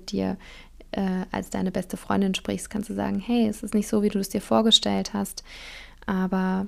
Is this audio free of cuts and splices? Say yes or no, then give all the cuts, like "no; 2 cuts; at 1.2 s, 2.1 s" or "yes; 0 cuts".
yes; 0 cuts